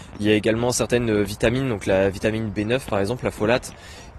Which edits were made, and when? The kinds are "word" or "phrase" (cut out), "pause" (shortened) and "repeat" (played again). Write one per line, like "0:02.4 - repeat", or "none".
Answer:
none